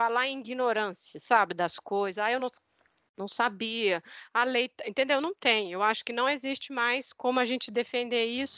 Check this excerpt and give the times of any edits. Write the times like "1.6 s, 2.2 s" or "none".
none